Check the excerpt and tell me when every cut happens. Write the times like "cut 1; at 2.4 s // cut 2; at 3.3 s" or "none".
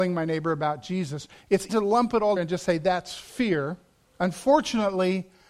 cut 1; at 1.7 s // cut 2; at 2.4 s